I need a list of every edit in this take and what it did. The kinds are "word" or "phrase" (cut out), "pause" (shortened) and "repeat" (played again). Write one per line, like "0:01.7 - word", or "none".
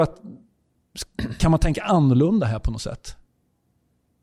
none